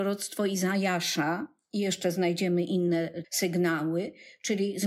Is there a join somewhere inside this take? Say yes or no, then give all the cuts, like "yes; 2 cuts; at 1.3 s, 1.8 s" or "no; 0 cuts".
yes; 1 cut; at 3.2 s